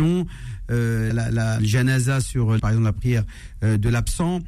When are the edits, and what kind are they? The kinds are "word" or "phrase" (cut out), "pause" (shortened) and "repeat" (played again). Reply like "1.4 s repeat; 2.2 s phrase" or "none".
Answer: 1.1 s word; 1.6 s phrase; 2.6 s word

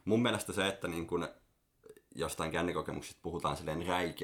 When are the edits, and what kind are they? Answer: none

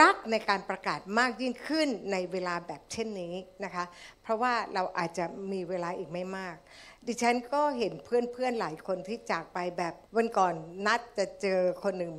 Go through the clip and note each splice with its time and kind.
10.1 s pause

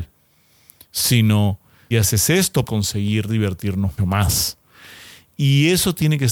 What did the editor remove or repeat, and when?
1.9 s word; 2.7 s word; 4.0 s word

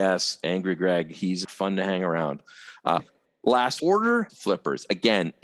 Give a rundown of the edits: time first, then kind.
1.4 s word; 3.0 s word; 3.8 s word; 4.3 s word

